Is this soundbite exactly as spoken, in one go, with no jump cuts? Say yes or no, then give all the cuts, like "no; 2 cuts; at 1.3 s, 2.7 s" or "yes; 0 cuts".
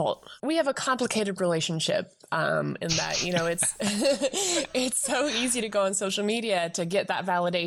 yes; 0 cuts